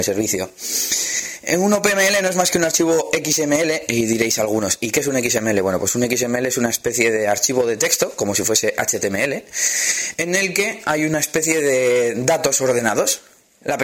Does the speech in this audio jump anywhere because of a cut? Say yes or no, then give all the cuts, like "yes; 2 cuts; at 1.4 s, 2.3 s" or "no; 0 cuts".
no; 0 cuts